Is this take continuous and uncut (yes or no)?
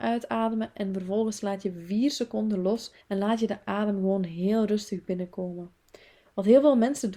no